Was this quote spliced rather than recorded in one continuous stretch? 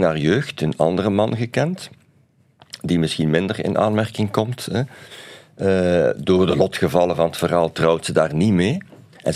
no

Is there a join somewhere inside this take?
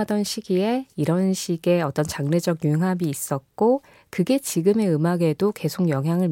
no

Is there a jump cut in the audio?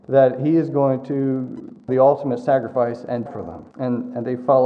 yes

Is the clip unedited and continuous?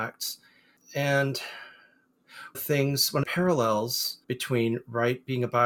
no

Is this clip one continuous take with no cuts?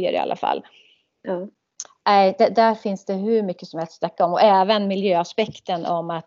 yes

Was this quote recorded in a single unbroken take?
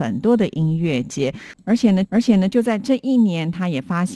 no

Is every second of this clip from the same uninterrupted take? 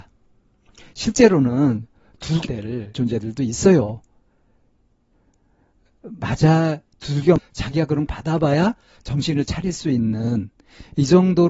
no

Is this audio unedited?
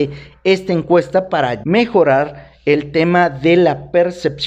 no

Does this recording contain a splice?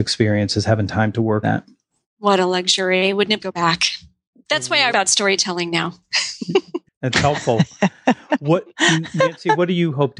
yes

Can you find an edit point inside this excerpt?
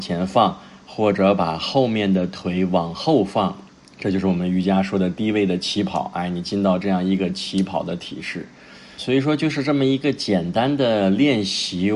yes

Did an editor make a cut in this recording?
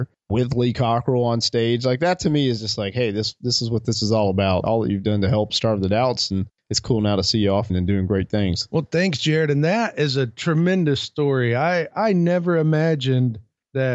yes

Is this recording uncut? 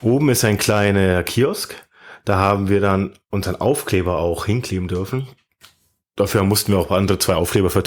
yes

